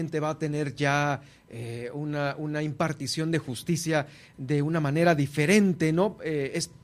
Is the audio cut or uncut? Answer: uncut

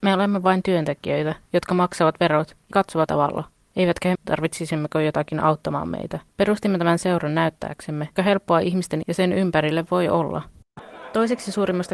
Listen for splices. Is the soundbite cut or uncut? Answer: cut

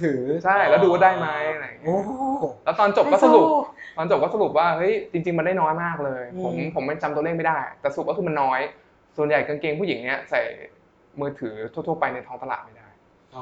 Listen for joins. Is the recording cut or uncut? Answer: uncut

